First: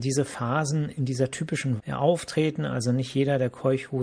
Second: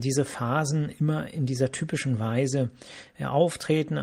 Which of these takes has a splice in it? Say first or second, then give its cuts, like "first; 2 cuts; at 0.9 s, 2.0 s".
first; 2 cuts; at 1.0 s, 1.8 s